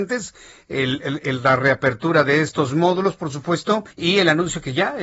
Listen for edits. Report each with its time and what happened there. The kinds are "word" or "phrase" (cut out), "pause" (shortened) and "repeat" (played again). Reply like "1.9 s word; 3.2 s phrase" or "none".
3.9 s pause